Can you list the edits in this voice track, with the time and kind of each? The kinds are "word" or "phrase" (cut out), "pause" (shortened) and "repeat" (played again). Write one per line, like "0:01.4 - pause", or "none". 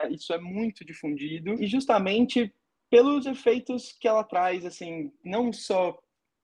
0:01.6 - word